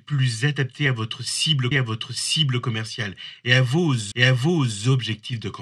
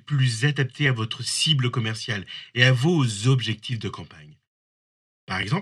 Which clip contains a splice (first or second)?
first